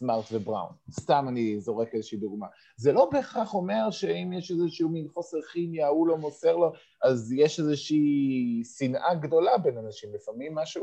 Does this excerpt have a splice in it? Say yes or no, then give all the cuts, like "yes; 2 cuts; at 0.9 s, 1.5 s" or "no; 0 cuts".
no; 0 cuts